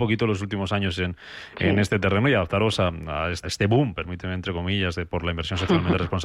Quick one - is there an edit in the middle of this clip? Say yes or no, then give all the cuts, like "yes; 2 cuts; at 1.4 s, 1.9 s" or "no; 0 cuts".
yes; 1 cut; at 3.4 s